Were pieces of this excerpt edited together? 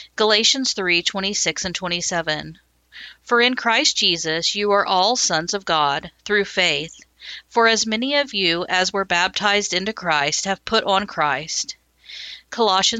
no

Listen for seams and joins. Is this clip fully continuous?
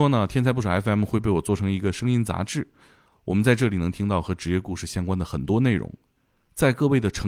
yes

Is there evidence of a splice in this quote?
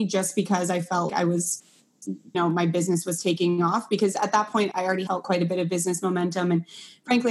yes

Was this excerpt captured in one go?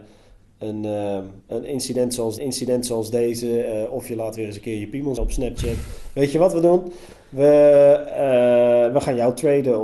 no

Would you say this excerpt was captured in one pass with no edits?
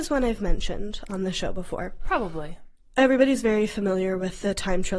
yes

